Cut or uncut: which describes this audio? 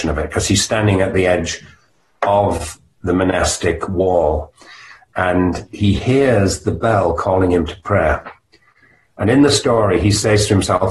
uncut